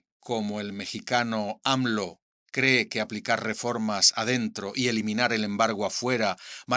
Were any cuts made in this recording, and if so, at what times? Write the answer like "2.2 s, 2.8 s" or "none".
none